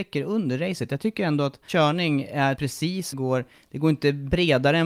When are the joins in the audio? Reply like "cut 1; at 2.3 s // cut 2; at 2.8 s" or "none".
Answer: cut 1; at 1.7 s // cut 2; at 2.6 s // cut 3; at 3.1 s